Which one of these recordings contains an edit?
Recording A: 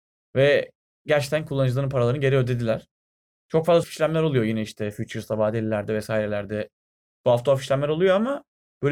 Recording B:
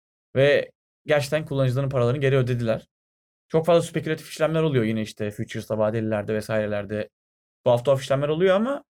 A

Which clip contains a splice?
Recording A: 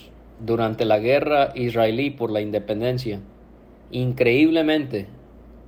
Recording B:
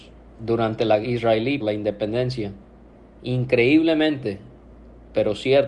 B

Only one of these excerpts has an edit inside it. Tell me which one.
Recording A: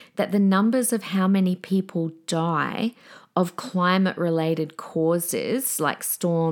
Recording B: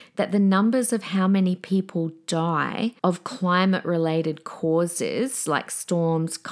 B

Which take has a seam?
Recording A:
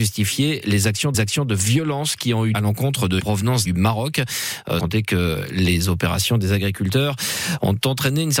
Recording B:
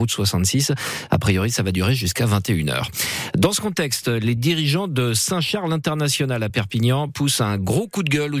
A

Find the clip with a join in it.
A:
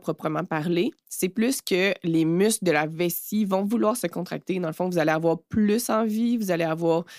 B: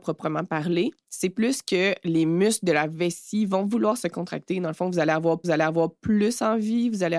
B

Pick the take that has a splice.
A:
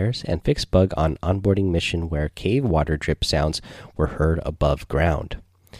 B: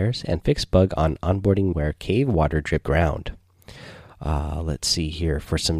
B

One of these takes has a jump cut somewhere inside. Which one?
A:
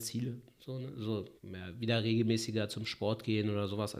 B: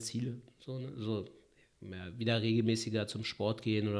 A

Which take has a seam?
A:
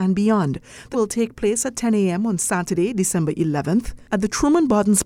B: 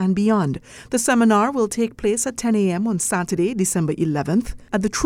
A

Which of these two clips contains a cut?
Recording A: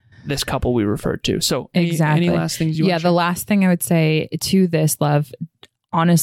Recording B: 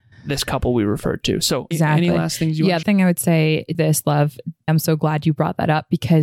B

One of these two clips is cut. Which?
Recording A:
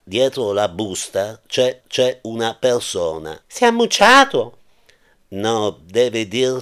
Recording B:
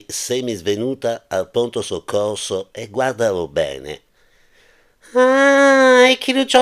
A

